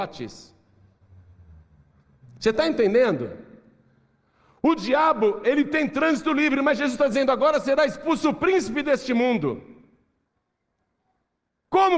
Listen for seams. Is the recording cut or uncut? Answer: uncut